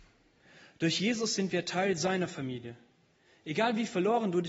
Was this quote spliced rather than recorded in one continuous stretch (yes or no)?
no